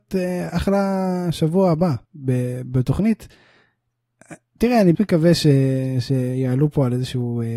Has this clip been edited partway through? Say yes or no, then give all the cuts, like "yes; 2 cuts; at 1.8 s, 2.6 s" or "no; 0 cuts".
yes; 2 cuts; at 2.0 s, 4.9 s